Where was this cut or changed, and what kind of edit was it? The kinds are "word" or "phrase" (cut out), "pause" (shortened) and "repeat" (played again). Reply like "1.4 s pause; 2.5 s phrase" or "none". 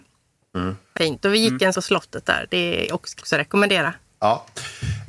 1.0 s phrase; 1.7 s phrase; 3.2 s word